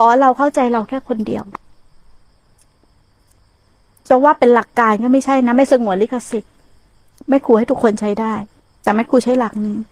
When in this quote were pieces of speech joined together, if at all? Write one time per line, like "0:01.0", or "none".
0:08.6